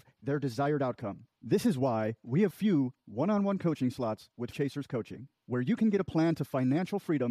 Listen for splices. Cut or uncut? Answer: cut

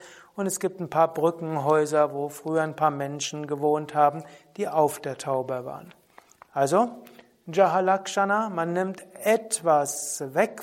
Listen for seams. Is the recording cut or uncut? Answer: uncut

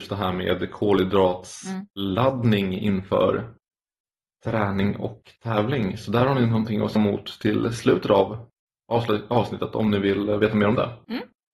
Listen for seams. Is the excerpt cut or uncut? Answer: cut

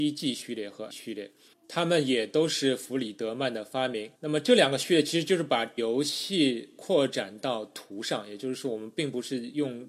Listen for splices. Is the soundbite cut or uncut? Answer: cut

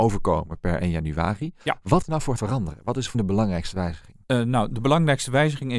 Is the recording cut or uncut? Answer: cut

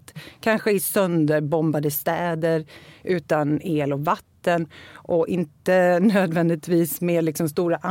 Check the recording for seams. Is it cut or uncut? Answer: uncut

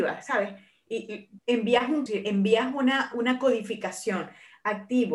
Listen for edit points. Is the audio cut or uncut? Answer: cut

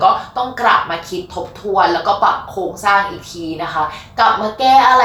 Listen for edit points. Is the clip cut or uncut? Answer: uncut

